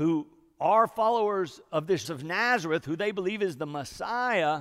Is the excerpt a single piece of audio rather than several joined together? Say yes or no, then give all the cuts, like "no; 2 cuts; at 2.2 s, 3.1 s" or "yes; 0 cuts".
no; 1 cut; at 2.0 s